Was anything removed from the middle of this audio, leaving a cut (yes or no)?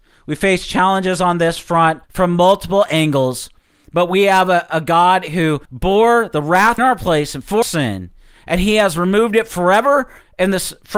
yes